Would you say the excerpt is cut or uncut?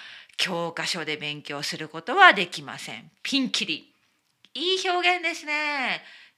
uncut